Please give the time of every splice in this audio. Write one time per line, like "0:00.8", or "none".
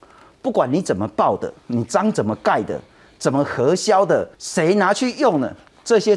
0:01.6
0:04.3